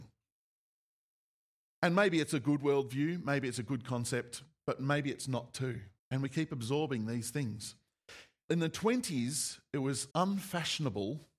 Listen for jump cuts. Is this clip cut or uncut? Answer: cut